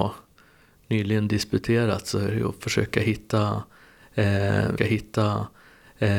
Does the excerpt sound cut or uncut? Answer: cut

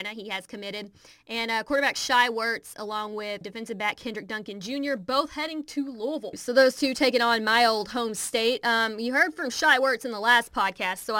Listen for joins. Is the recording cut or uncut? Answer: cut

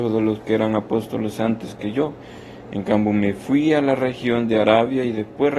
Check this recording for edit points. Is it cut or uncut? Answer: uncut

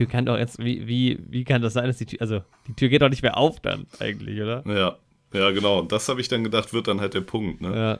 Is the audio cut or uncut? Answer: uncut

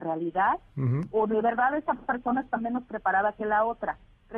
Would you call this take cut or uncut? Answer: uncut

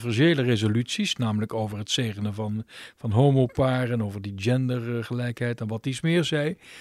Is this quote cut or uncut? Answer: uncut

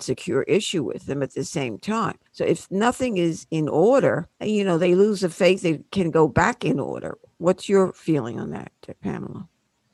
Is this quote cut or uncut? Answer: cut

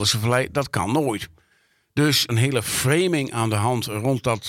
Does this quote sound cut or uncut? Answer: cut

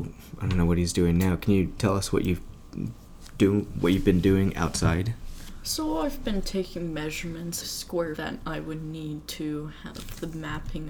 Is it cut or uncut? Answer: cut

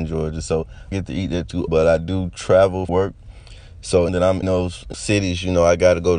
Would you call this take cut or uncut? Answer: cut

